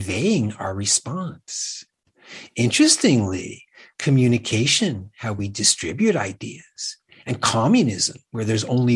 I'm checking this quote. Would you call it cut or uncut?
uncut